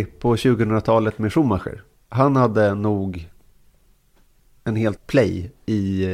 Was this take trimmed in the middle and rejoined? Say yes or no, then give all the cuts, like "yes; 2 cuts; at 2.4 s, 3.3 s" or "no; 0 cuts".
yes; 1 cut; at 5.0 s